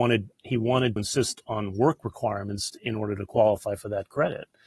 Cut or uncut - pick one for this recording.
cut